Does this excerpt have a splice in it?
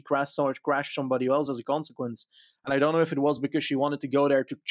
no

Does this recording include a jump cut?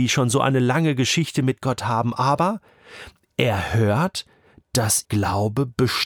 yes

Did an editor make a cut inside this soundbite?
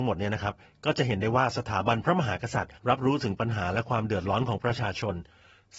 yes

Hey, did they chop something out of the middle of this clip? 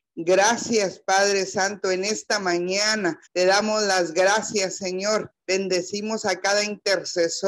yes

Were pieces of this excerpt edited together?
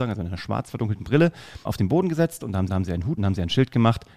yes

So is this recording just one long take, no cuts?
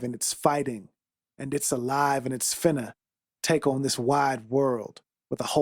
yes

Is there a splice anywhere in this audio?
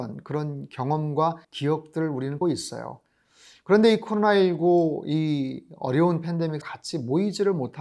yes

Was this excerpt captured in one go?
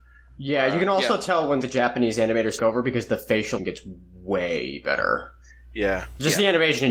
no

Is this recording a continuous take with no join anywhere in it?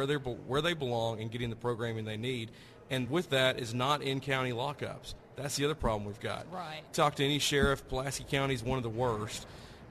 yes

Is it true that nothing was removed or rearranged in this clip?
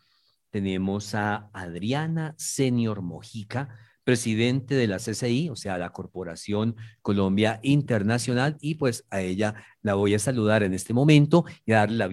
yes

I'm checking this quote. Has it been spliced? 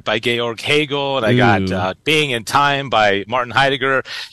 no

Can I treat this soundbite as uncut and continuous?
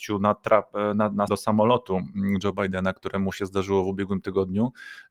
no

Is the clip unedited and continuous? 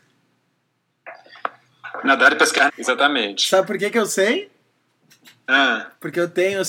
no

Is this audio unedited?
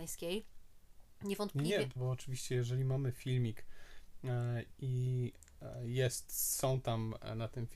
no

